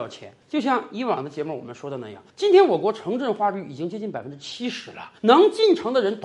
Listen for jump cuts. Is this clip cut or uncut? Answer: cut